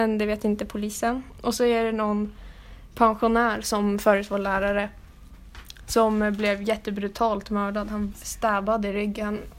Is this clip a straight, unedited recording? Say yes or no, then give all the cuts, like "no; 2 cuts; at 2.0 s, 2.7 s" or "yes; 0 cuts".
no; 1 cut; at 8.1 s